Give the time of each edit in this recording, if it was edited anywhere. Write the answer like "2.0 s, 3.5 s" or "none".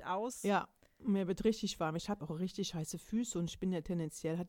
2.2 s